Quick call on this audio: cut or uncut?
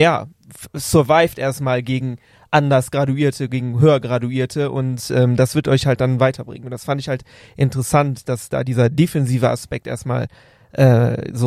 uncut